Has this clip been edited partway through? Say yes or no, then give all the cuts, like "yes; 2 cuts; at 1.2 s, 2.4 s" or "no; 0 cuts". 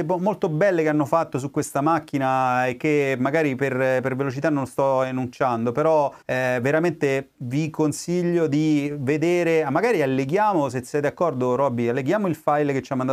yes; 1 cut; at 6.2 s